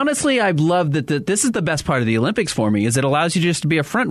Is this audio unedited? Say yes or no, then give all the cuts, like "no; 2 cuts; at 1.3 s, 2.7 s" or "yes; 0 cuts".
yes; 0 cuts